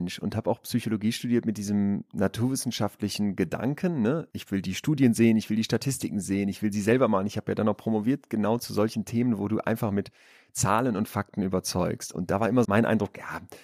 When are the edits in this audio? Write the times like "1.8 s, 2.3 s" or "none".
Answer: 12.6 s